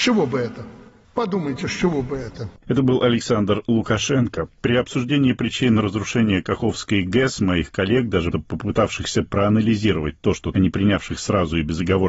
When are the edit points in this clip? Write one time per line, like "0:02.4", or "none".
0:08.3
0:10.5